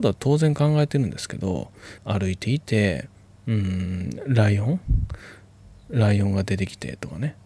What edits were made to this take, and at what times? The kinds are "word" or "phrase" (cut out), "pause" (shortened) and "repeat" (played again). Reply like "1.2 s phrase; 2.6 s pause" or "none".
2.0 s phrase